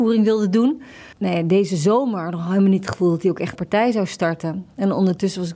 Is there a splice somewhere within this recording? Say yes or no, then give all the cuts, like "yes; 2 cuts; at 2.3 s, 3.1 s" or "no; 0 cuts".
yes; 2 cuts; at 1.1 s, 3.5 s